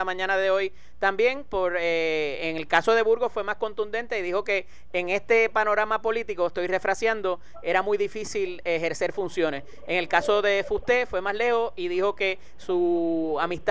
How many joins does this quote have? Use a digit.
0